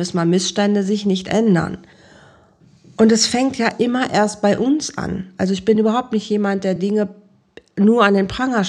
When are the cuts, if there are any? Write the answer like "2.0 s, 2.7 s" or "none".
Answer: none